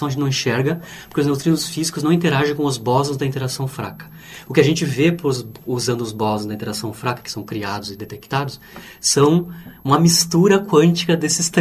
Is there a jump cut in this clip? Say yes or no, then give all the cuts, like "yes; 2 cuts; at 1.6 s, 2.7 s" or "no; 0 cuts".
no; 0 cuts